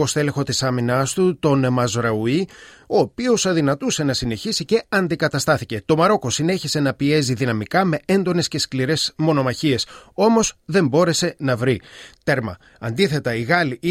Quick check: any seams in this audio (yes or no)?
no